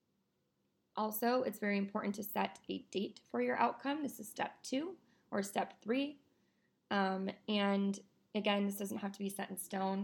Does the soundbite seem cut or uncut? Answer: uncut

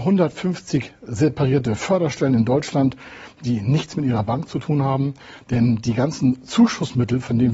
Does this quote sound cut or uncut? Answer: uncut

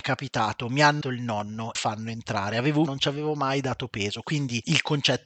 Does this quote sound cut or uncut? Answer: cut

